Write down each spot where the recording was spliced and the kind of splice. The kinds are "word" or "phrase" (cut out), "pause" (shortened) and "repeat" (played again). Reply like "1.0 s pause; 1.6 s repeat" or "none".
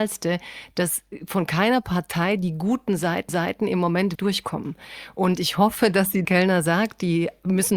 3.3 s repeat; 4.1 s word; 6.2 s phrase

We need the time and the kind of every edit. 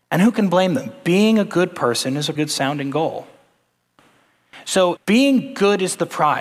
2.4 s word; 5.0 s word

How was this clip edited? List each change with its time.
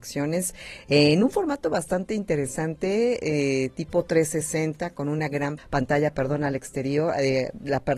5.6 s word

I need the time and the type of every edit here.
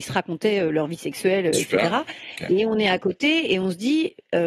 none

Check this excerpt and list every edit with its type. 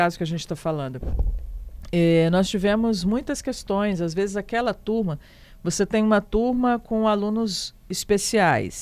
none

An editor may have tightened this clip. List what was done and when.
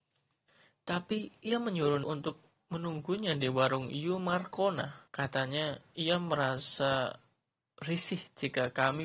2.0 s word; 5.1 s pause

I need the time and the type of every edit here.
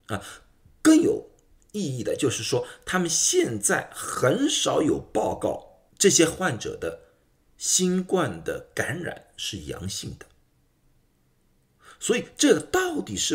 5.9 s pause

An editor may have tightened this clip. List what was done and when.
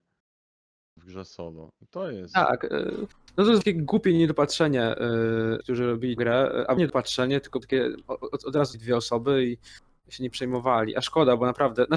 3.6 s word; 5.6 s word; 6.2 s word; 6.8 s word; 7.6 s word; 8.7 s word

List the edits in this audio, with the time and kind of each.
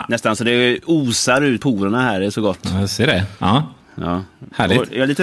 1.6 s word

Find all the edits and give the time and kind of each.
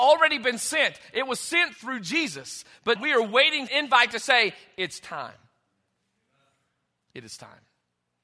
3.0 s word; 3.7 s phrase

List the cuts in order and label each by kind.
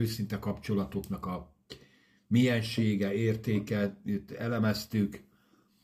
none

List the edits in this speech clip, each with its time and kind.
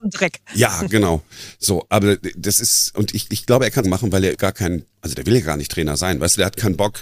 2.9 s word; 3.3 s repeat; 3.8 s phrase; 4.3 s word; 4.9 s pause

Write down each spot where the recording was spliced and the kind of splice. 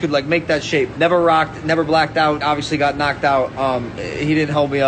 0.9 s word; 2.4 s word

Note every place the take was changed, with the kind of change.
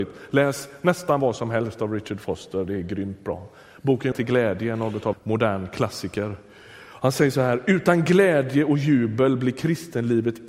4.1 s phrase; 5.1 s word

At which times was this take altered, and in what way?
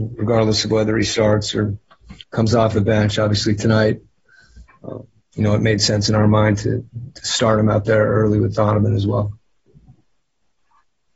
2.2 s pause; 5.2 s pause

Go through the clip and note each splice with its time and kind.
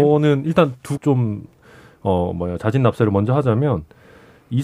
1.0 s phrase

